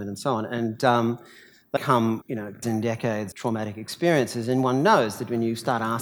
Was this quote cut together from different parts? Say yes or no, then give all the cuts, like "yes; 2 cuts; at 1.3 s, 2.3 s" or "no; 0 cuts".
yes; 4 cuts; at 1.8 s, 2.2 s, 2.6 s, 3.3 s